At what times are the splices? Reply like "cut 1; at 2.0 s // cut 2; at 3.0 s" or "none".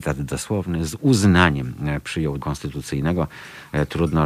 cut 1; at 2.4 s